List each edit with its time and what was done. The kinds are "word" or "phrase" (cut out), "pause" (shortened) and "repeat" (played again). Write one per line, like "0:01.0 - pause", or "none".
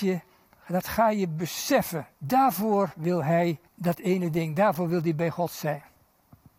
0:02.1 - pause
0:03.7 - pause